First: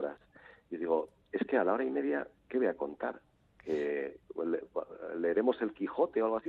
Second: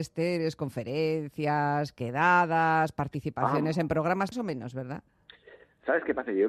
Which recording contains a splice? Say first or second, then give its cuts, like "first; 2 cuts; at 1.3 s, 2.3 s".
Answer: second; 1 cut; at 4.3 s